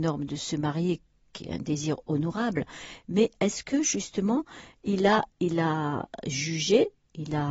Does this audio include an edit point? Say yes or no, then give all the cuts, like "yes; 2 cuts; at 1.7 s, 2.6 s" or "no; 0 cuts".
yes; 2 cuts; at 1.3 s, 5.3 s